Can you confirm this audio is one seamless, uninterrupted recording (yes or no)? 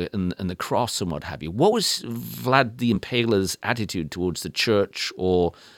yes